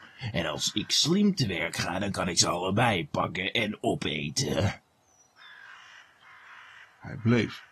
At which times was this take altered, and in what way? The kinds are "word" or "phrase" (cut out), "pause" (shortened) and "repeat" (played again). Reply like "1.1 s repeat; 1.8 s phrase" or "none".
none